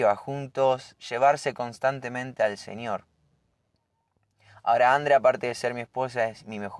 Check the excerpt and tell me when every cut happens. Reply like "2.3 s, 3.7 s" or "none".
1.0 s

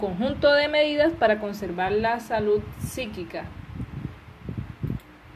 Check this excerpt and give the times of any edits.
none

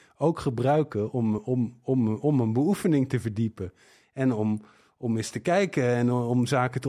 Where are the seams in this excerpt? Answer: none

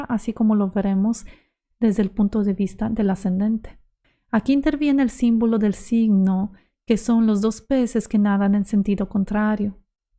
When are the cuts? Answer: 4.0 s

